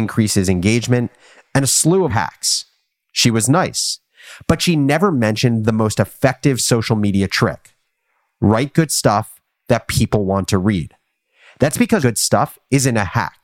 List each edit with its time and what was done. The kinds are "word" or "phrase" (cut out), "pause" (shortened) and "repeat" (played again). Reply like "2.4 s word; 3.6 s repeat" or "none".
2.1 s word; 12.0 s word